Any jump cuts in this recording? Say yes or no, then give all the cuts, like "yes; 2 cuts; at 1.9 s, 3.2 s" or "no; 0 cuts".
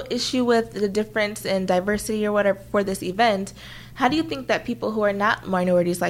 no; 0 cuts